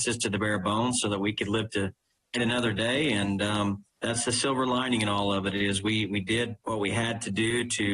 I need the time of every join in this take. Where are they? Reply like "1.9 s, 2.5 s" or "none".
2.3 s, 3.9 s, 6.6 s

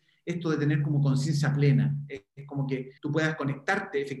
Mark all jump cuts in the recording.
3.0 s

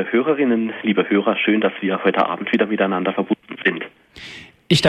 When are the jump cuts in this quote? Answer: none

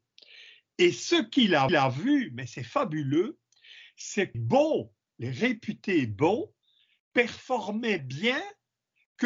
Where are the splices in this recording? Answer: 1.7 s, 4.3 s, 8.0 s

